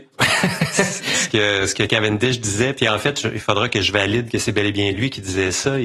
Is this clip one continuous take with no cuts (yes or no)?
yes